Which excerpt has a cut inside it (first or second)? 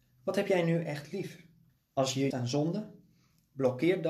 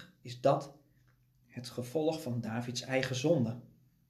first